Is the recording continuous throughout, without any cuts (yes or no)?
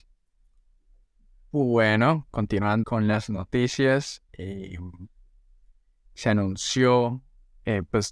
no